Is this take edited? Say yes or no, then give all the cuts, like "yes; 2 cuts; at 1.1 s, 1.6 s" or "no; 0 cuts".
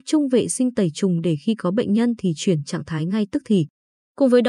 no; 0 cuts